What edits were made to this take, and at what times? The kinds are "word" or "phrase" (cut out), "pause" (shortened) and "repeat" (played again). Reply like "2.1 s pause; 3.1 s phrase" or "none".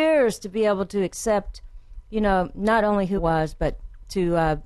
3.2 s word